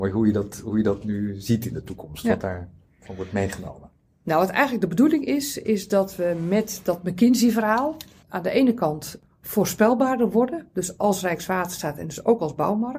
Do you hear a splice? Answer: no; 0 cuts

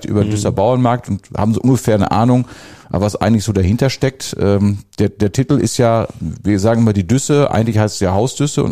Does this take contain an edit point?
no; 0 cuts

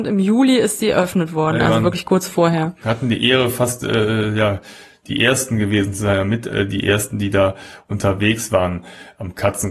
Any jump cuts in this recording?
no; 0 cuts

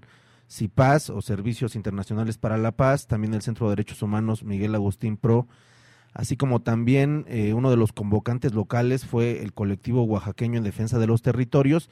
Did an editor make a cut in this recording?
no; 0 cuts

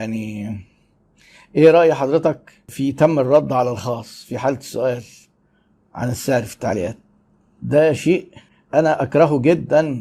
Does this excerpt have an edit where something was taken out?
no; 0 cuts

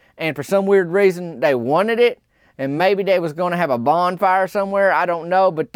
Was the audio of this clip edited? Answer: no; 0 cuts

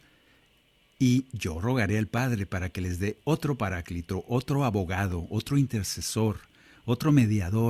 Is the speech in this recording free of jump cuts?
yes; 0 cuts

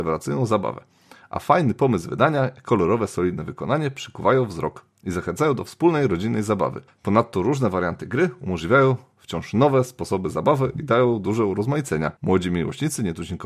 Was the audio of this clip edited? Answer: yes; 2 cuts; at 6.9 s, 12.2 s

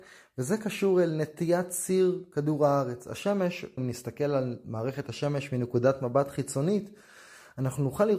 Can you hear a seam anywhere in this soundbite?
yes; 1 cut; at 3.8 s

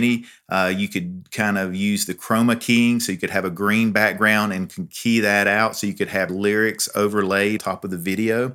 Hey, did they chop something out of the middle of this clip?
yes; 2 cuts; at 6.3 s, 7.6 s

